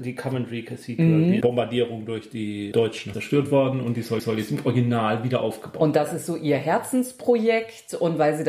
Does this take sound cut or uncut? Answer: cut